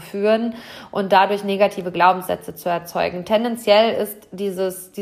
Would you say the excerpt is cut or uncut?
uncut